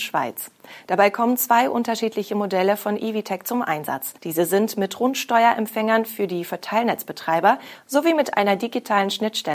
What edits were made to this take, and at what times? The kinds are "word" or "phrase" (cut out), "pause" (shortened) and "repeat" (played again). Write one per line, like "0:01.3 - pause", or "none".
0:04.2 - pause